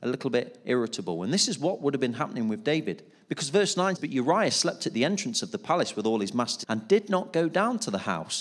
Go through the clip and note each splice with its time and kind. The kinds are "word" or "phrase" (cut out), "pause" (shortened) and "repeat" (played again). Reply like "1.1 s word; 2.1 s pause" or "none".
4.0 s word; 6.6 s word